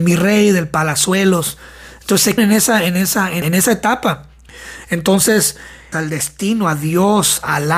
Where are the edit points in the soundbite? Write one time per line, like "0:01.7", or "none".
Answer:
0:02.4
0:03.4
0:05.9